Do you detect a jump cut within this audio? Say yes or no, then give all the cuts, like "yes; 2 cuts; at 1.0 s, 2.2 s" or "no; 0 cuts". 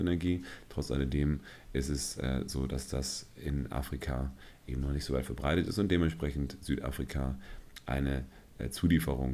no; 0 cuts